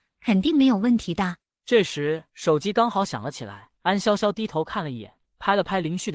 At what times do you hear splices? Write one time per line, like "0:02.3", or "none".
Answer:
0:02.3
0:03.8
0:05.3